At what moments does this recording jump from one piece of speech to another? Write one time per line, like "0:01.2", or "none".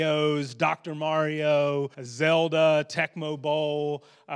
0:01.9